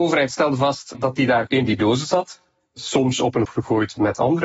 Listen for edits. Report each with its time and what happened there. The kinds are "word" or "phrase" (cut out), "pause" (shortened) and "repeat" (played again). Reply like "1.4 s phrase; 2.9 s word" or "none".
0.9 s word; 1.5 s word; 3.5 s word